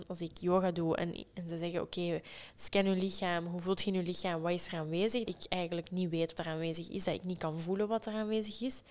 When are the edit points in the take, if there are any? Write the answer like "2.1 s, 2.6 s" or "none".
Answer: 5.3 s, 6.3 s